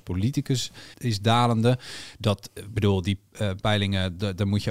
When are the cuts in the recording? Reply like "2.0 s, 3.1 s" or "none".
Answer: 0.9 s